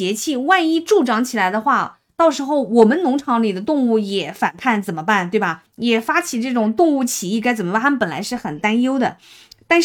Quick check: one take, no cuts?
no; 1 cut; at 5.7 s

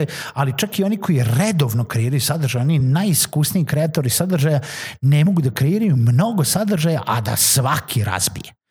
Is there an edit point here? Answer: no; 0 cuts

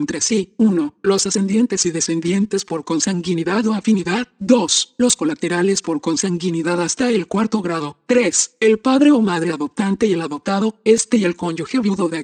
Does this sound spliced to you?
no; 0 cuts

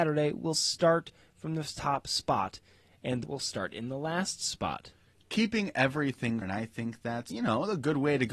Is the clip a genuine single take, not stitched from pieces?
no; 3 cuts; at 3.2 s, 6.4 s, 7.3 s

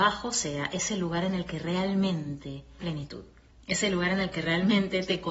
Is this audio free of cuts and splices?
no; 1 cut; at 2.8 s

